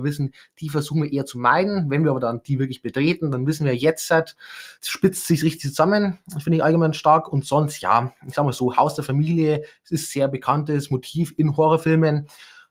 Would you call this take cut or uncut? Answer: cut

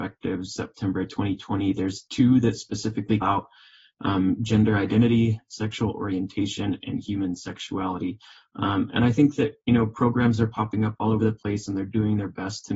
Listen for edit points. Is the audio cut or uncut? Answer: cut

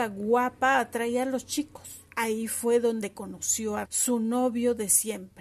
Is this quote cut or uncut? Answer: cut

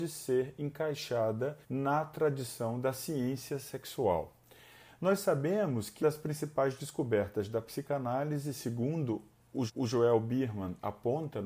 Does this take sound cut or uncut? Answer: cut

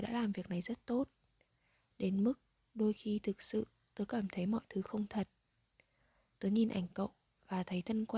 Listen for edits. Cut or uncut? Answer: uncut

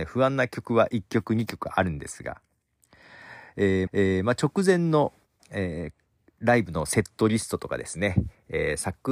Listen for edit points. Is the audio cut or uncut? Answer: cut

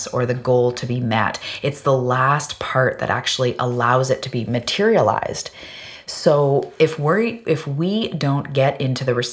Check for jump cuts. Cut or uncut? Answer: uncut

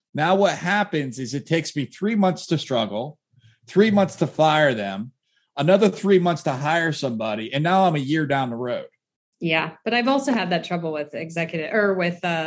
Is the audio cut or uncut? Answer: uncut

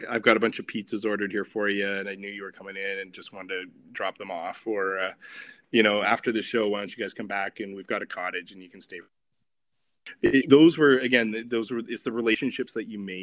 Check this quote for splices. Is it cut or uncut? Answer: uncut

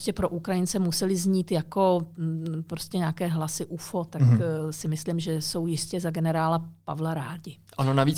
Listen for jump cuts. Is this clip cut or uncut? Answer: uncut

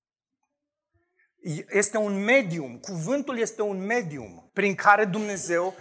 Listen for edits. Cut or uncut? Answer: cut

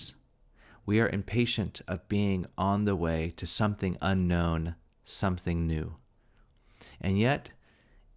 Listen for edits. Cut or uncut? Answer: uncut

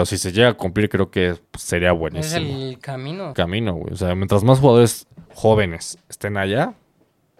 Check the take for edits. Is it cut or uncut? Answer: cut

